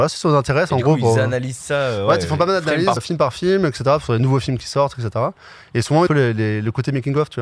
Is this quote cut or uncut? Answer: cut